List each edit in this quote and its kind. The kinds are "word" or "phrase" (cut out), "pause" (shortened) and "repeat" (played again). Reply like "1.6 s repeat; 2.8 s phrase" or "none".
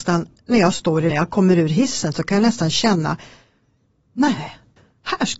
1.1 s word